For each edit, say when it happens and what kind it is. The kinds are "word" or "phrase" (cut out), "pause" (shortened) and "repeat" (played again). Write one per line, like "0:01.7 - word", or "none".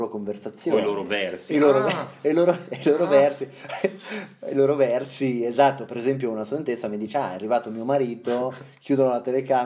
none